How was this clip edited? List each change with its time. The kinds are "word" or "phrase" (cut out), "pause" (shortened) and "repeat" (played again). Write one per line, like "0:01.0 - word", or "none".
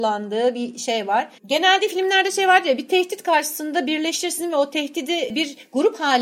0:01.4 - pause